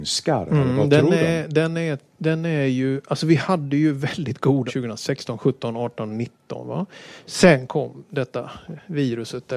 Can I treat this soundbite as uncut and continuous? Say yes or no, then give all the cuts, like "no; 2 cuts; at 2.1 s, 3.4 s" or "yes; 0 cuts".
no; 1 cut; at 4.7 s